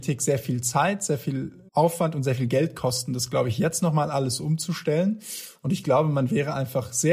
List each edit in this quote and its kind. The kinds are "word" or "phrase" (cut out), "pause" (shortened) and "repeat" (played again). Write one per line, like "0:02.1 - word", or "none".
0:01.7 - pause